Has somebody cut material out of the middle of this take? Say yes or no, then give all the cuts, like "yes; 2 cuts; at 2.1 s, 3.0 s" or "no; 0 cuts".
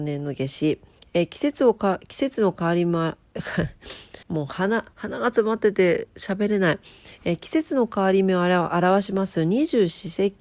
yes; 2 cuts; at 4.2 s, 4.9 s